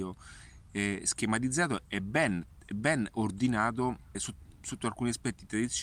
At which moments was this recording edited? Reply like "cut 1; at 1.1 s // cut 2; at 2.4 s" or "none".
cut 1; at 4.1 s